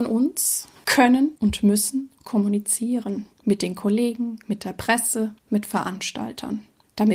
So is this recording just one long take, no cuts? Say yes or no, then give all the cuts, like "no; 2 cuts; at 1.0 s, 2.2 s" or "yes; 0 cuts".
no; 3 cuts; at 1.4 s, 3.3 s, 5.4 s